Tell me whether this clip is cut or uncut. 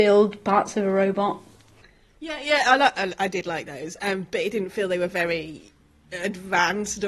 uncut